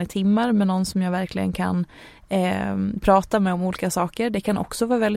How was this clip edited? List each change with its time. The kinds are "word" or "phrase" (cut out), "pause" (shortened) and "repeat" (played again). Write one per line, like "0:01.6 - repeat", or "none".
none